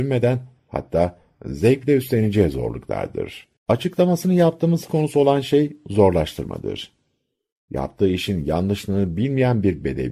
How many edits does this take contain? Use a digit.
2